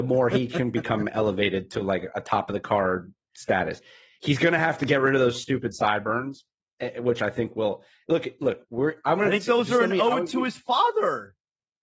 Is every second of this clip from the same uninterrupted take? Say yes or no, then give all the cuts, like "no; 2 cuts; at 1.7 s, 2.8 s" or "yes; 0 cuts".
yes; 0 cuts